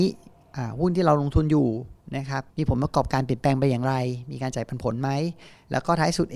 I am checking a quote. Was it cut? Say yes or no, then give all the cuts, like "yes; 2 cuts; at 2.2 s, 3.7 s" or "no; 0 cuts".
yes; 1 cut; at 2.5 s